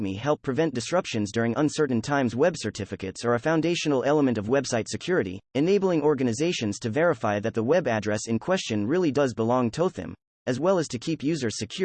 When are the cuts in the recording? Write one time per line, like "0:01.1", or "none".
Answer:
0:05.4